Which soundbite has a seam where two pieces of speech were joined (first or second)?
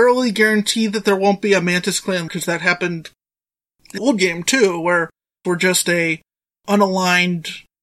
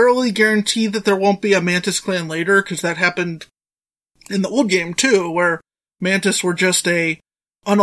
first